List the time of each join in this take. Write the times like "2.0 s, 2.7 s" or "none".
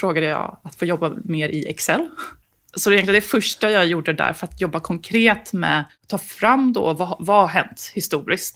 none